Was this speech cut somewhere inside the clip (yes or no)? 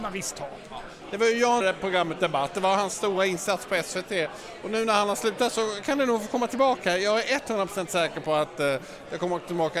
yes